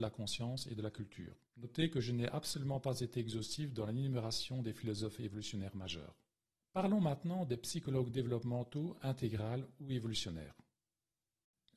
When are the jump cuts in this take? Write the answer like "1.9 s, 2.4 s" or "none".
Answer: 1.5 s, 6.5 s